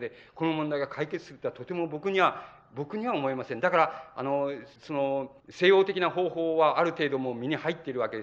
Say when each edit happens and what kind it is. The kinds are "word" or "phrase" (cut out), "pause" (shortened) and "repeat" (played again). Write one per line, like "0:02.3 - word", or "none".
0:04.8 - pause
0:05.4 - pause